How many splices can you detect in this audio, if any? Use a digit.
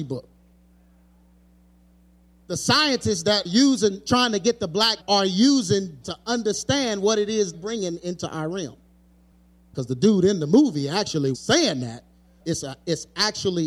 6